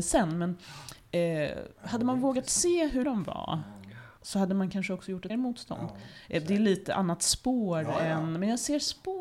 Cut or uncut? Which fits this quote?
cut